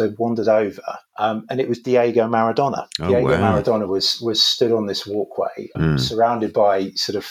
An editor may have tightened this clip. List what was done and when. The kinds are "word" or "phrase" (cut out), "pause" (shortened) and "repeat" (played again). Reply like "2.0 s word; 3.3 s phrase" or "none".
1.1 s pause; 2.9 s pause; 5.7 s word